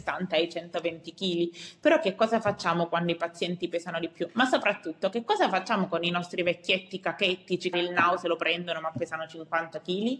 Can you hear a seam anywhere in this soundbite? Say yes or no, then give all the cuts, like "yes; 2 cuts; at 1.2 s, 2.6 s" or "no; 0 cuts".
yes; 1 cut; at 7.7 s